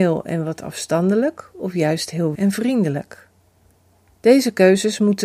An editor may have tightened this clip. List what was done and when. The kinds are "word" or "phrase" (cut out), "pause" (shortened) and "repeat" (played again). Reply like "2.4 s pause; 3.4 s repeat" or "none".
2.4 s word